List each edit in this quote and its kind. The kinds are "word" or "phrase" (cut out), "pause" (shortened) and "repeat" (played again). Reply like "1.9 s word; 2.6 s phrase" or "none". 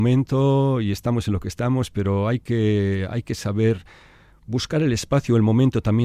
none

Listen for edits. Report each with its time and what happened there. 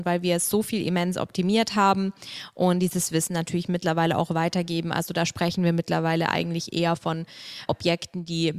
7.7 s word

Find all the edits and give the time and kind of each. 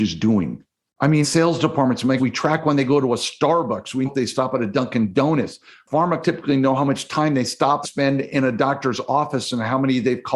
1.2 s word; 2.2 s word; 4.0 s word; 6.2 s word; 7.8 s word

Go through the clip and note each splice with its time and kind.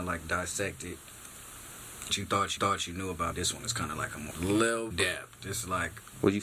2.1 s word; 2.6 s repeat; 3.3 s word; 4.3 s word; 4.9 s phrase

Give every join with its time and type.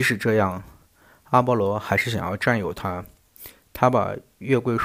none

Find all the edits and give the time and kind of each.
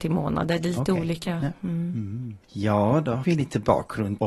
2.4 s pause; 3.2 s word

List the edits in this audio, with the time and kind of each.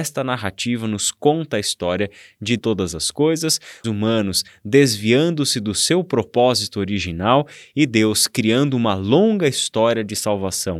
2.6 s phrase; 3.8 s phrase

